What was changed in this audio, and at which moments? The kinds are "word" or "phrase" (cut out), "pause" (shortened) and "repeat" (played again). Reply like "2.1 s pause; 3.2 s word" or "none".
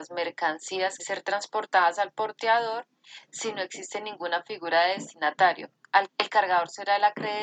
1.0 s phrase; 6.1 s phrase